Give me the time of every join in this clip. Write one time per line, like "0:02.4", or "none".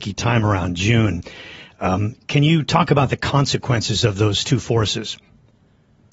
none